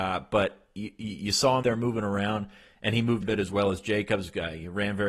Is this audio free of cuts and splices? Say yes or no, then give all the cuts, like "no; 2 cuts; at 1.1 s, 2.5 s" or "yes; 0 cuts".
no; 2 cuts; at 1.6 s, 3.2 s